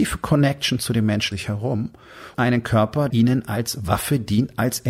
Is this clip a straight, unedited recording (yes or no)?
no